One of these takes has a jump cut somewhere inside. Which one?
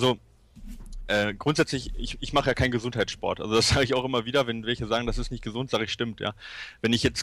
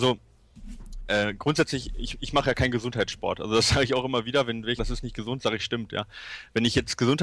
second; 1 cut; at 4.8 s

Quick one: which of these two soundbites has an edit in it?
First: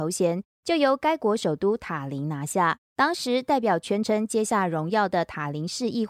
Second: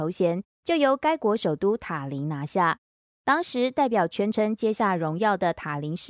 first; 1 cut; at 2.8 s

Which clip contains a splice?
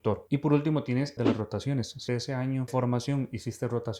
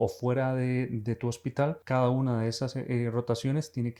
first; 3 cuts; at 1.2 s, 2.1 s, 2.7 s

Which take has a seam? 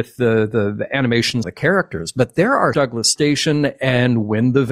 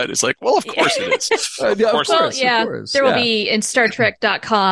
first; 2 cuts; at 1.4 s, 2.7 s

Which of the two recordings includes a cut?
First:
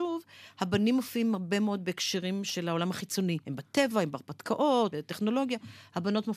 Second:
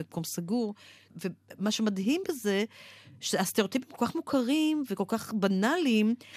first; 2 cuts; at 3.4 s, 4.9 s

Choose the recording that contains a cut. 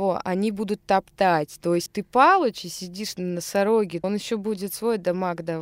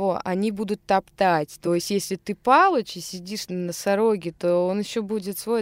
first; 2 cuts; at 1.9 s, 4.0 s

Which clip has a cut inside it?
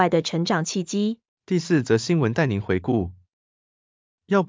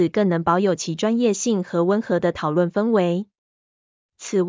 first; 1 cut; at 1.3 s

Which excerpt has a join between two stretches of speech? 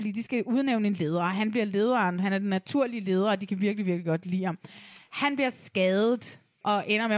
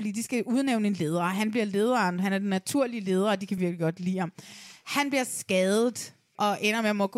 second; 1 cut; at 3.6 s

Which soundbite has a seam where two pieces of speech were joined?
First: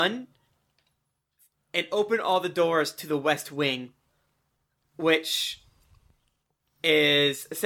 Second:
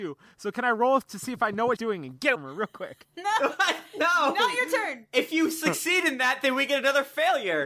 second; 2 cuts; at 1.8 s, 2.3 s

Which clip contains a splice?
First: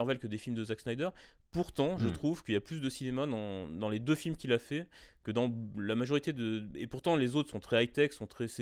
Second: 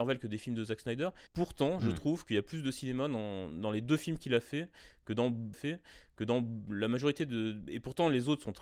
second; 2 cuts; at 1.3 s, 5.5 s

